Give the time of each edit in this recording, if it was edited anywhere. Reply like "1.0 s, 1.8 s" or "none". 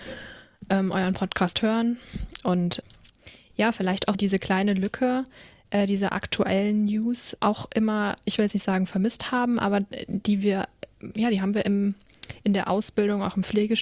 4.1 s, 7.4 s